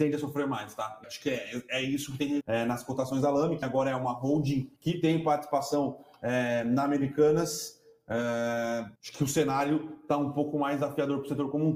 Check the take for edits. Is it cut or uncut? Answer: cut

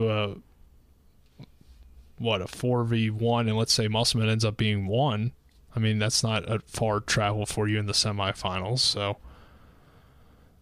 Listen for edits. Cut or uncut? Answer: uncut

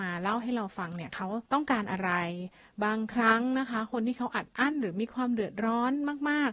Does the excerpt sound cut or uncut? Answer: cut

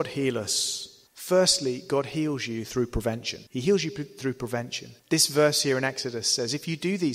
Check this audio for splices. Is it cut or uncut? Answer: cut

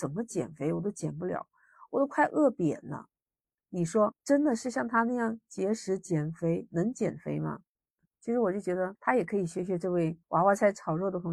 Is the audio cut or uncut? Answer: uncut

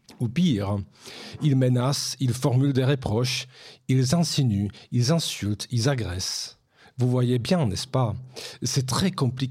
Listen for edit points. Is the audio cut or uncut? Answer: cut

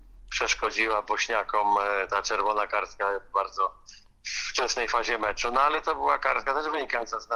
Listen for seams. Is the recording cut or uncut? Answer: uncut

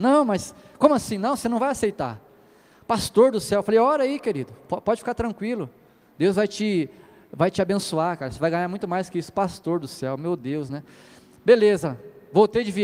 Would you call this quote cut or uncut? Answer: uncut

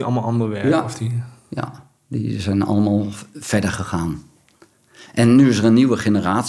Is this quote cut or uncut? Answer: uncut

